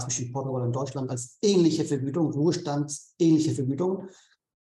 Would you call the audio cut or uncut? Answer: uncut